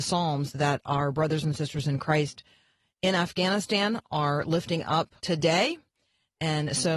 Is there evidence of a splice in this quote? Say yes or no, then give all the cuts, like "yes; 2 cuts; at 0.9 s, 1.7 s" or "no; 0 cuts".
yes; 1 cut; at 5.2 s